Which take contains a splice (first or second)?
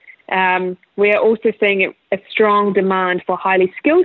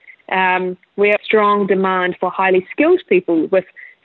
second